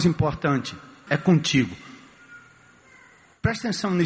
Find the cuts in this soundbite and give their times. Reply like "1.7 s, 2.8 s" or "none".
1.1 s